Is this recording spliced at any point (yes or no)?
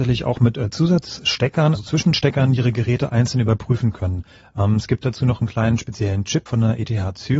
yes